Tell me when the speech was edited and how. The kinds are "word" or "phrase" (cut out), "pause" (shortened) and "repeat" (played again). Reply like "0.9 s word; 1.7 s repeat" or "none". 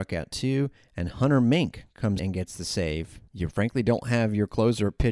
2.2 s word; 3.3 s pause

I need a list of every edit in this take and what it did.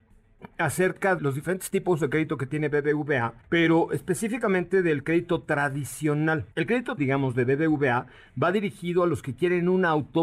1.2 s word; 3.4 s pause; 6.5 s pause; 7.0 s word

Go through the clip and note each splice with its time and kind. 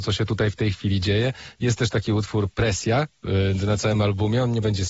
none

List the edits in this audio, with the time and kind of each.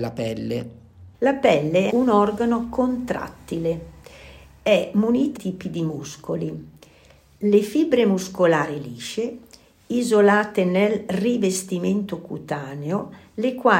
1.1 s pause; 1.9 s word; 5.4 s phrase

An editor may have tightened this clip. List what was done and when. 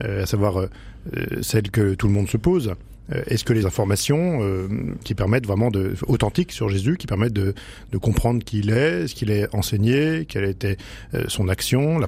3.6 s phrase

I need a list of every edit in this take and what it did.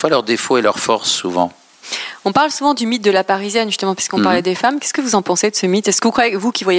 none

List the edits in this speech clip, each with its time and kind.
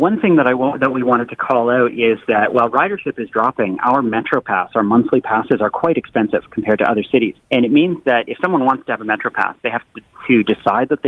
7.4 s pause

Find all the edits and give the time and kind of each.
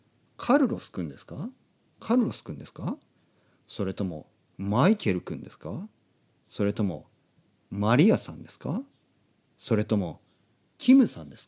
none

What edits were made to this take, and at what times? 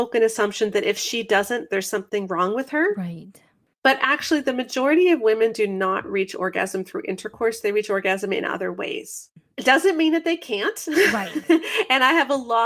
none

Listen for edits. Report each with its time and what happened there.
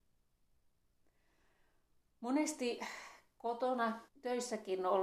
4.1 s word

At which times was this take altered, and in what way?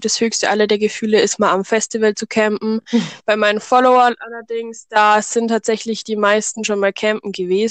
none

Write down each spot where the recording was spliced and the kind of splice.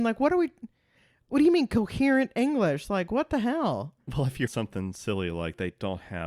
4.0 s pause; 4.5 s word

